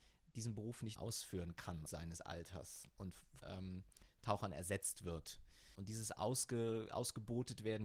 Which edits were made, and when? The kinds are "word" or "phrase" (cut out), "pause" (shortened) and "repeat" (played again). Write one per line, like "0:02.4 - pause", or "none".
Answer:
0:01.0 - word
0:01.9 - word
0:03.4 - phrase